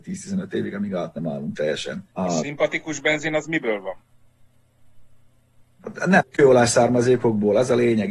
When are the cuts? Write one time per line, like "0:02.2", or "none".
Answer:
0:02.1